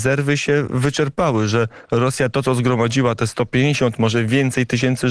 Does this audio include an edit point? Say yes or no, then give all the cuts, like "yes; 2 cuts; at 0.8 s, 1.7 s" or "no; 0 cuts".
no; 0 cuts